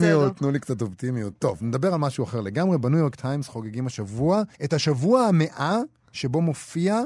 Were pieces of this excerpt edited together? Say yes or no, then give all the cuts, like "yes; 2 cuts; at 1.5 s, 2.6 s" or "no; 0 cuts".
yes; 1 cut; at 4.5 s